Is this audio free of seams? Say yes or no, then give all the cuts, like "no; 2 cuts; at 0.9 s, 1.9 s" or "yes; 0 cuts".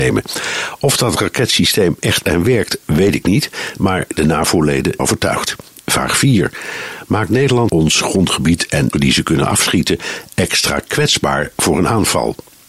no; 5 cuts; at 2.2 s, 5.0 s, 5.8 s, 7.7 s, 8.9 s